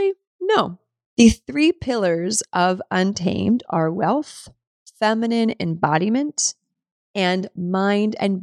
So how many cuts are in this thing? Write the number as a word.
zero